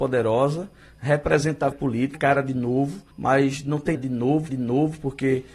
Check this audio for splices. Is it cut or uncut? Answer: cut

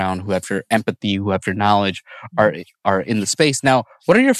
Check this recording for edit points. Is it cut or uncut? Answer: uncut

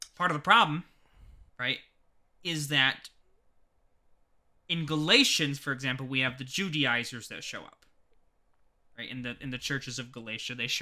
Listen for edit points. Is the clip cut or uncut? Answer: cut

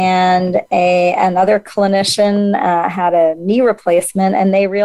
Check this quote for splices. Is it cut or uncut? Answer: uncut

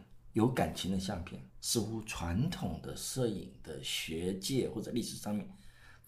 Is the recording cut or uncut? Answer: cut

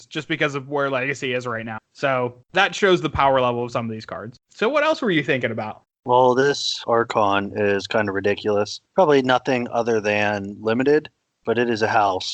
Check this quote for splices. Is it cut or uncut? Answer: cut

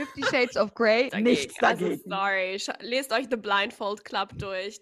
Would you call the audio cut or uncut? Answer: cut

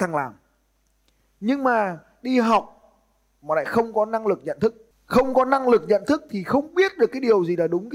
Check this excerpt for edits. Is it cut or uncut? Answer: uncut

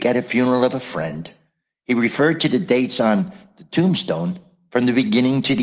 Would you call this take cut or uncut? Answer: uncut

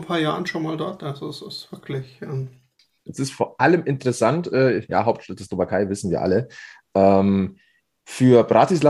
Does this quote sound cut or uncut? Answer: uncut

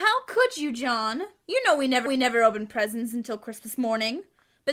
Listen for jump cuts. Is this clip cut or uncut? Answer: cut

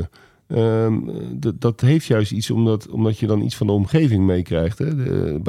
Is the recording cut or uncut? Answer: uncut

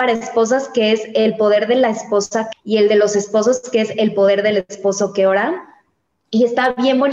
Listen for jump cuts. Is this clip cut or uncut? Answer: cut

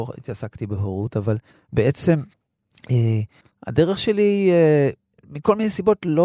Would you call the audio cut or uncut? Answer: cut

